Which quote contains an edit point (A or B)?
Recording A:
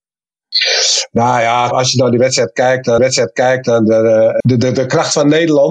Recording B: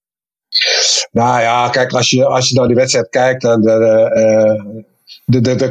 A